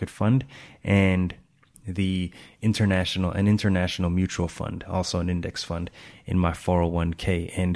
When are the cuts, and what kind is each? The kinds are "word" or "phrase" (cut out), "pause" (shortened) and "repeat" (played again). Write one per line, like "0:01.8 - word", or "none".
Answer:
0:01.7 - word